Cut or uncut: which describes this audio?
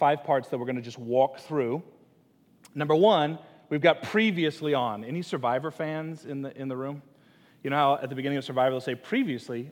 uncut